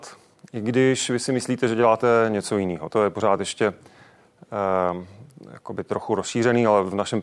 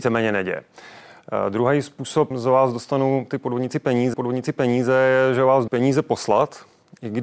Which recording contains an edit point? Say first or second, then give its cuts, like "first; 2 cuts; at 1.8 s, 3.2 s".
second; 3 cuts; at 2.3 s, 4.1 s, 5.7 s